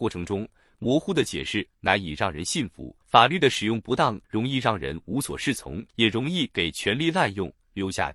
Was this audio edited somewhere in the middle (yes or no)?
yes